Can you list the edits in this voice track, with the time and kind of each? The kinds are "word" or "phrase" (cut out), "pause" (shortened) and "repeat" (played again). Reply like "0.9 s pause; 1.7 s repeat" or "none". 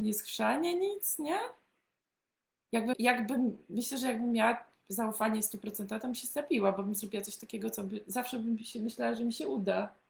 2.9 s word